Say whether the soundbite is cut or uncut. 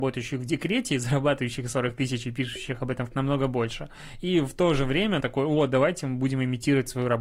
cut